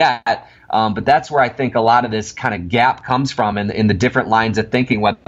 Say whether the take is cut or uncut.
uncut